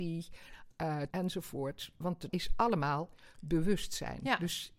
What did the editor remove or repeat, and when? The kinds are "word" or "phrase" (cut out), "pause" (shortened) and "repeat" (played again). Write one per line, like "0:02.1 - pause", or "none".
0:01.1 - word
0:02.3 - word

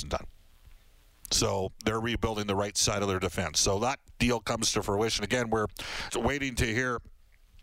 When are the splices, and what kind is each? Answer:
0:06.1 - word

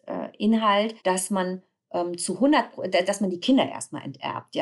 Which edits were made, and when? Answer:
0:01.0 - pause

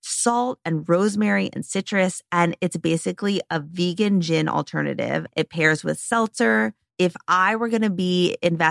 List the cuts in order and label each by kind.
none

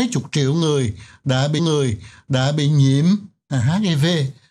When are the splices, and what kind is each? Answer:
0:01.6 - repeat

